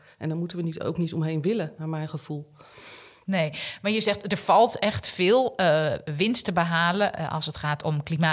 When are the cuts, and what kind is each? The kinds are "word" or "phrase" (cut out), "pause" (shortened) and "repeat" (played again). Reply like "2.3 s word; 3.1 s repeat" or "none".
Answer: none